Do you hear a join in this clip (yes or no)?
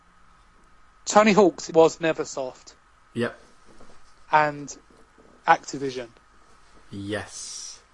yes